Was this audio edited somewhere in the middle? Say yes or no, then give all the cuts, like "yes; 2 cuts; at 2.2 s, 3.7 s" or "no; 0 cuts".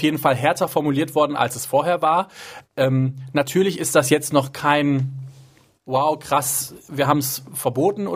no; 0 cuts